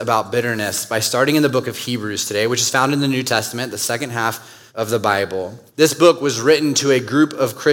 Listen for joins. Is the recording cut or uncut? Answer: cut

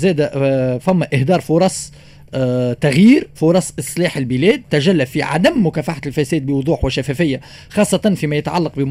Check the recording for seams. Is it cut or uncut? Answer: cut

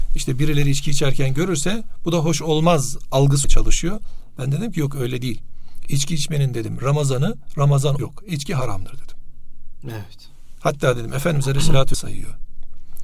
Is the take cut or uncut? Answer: cut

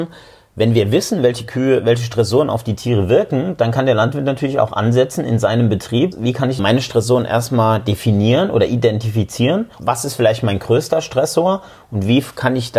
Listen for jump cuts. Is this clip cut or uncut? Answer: cut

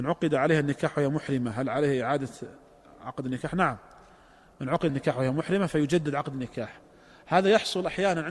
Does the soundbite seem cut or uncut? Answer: cut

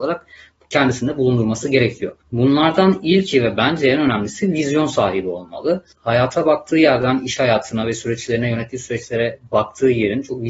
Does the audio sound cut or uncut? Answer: cut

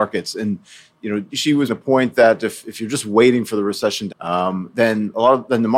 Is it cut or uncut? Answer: cut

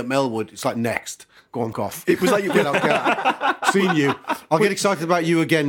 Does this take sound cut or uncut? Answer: cut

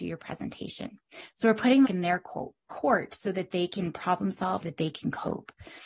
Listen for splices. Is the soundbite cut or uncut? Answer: cut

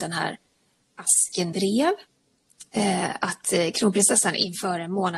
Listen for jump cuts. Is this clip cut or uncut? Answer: cut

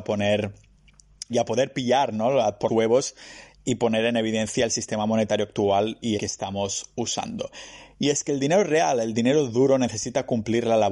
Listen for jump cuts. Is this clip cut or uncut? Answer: cut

